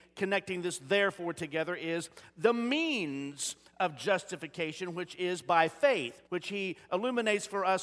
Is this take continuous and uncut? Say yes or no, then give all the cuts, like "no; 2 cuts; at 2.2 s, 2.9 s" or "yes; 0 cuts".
no; 1 cut; at 6.3 s